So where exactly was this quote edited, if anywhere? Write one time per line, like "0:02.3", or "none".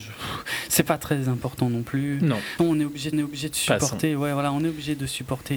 0:02.6
0:03.1